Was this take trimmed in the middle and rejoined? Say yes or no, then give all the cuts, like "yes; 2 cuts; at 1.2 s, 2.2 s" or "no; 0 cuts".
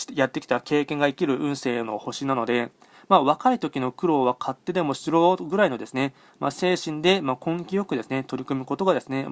no; 0 cuts